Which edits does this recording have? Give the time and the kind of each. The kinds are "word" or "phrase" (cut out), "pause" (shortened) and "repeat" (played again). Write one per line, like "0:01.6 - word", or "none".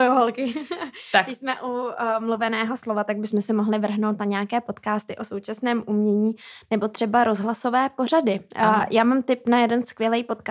0:08.5 - pause